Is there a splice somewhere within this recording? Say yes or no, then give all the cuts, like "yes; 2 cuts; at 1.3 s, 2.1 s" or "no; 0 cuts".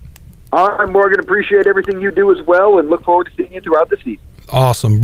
no; 0 cuts